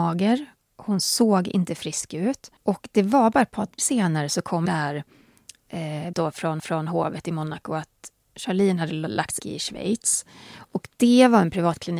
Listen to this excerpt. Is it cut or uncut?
cut